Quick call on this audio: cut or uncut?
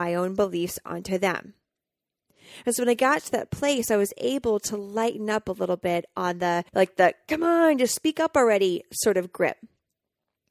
cut